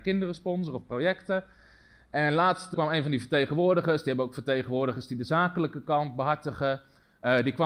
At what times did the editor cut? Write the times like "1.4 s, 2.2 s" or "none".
2.7 s